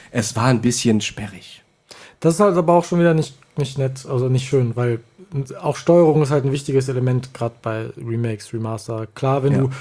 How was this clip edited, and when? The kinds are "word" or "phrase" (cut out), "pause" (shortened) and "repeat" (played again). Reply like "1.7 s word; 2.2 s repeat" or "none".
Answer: none